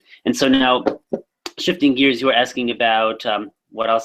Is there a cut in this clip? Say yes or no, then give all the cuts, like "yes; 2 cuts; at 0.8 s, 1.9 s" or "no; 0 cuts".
no; 0 cuts